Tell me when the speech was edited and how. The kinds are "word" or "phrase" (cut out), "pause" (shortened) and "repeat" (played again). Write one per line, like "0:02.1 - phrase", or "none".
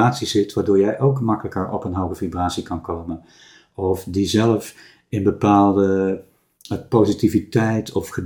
none